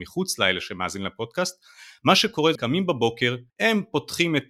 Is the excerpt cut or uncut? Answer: cut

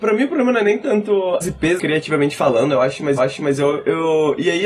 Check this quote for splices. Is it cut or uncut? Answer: cut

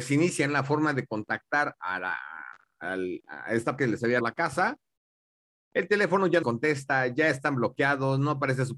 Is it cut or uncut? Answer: cut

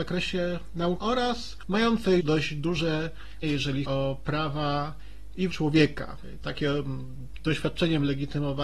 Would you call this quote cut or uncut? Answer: cut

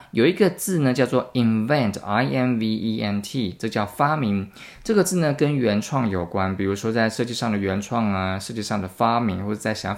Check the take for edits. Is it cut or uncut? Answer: uncut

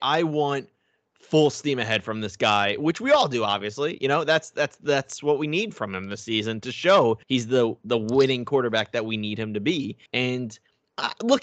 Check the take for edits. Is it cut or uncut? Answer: cut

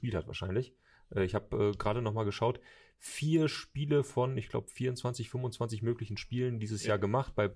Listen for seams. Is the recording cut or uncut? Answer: uncut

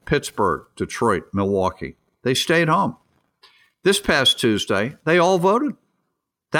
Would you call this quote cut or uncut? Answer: uncut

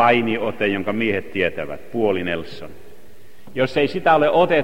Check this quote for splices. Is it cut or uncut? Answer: uncut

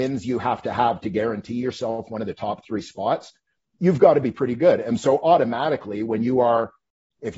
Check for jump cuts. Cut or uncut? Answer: uncut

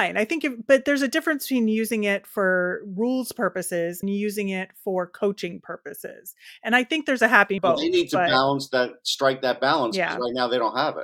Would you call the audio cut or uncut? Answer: cut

